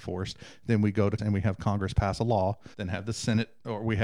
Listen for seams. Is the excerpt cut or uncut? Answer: cut